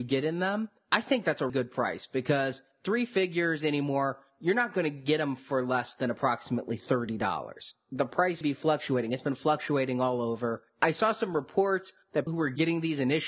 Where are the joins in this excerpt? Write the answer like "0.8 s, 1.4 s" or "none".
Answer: 1.5 s, 8.4 s, 12.3 s